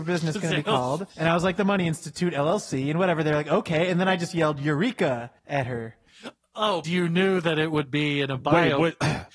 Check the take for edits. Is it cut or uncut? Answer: cut